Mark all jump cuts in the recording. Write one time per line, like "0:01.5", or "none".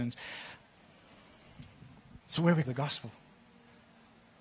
0:02.2
0:02.6